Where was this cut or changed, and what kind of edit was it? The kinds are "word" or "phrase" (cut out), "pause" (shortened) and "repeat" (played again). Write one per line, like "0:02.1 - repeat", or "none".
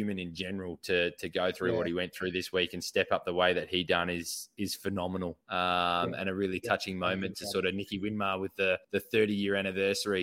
0:05.4 - pause
0:08.8 - pause